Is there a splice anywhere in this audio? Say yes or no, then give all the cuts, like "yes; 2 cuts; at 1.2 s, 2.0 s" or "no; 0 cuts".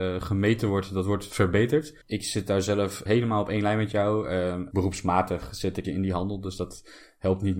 yes; 4 cuts; at 2.0 s, 3.1 s, 4.7 s, 5.8 s